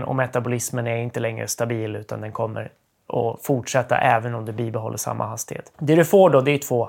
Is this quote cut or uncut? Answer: uncut